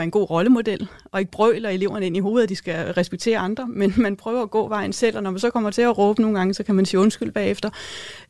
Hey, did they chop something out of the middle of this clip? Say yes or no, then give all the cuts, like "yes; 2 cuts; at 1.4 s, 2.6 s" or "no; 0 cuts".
no; 0 cuts